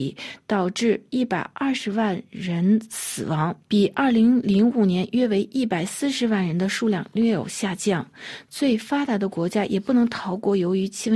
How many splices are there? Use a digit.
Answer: 1